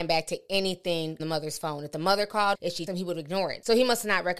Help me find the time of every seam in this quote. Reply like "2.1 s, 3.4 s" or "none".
1.2 s, 2.5 s, 2.9 s